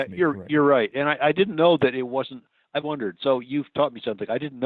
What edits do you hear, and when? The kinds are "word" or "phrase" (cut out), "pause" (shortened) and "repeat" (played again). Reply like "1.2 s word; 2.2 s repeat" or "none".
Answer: 2.8 s word